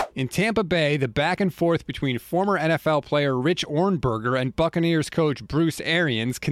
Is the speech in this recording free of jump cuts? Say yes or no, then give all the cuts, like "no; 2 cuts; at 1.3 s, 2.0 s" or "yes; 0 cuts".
yes; 0 cuts